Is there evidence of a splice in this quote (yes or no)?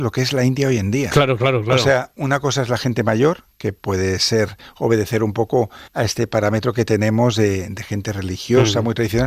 yes